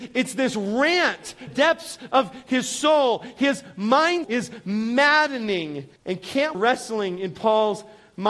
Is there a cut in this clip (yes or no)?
yes